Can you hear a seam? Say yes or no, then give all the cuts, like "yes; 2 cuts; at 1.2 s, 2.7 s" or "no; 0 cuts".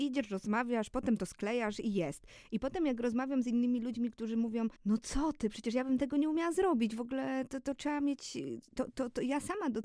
yes; 1 cut; at 4.8 s